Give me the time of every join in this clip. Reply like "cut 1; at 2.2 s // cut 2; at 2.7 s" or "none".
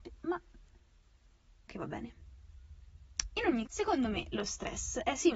cut 1; at 1.7 s // cut 2; at 3.7 s